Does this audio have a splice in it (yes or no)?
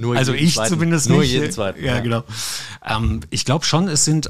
yes